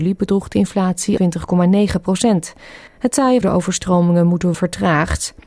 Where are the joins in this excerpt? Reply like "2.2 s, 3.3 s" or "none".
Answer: 1.2 s, 2.9 s, 3.4 s, 4.5 s